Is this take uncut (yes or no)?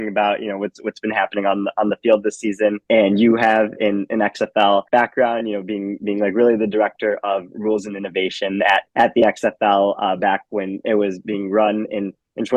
no